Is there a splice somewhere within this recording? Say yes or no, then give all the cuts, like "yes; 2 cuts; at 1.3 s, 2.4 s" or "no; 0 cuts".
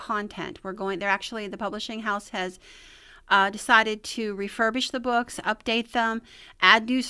no; 0 cuts